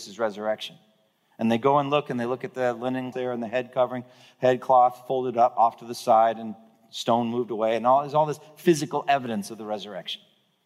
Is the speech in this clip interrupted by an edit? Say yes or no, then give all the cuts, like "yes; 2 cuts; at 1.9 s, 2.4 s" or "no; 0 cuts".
yes; 1 cut; at 3.1 s